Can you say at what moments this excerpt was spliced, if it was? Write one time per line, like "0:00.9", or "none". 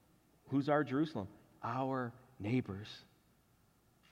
none